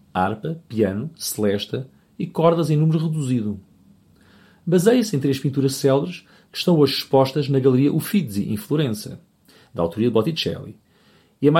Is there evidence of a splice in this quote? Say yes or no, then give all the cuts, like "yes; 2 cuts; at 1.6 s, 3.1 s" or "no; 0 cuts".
no; 0 cuts